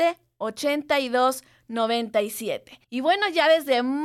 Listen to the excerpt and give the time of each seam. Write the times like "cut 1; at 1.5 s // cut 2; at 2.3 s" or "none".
cut 1; at 2.8 s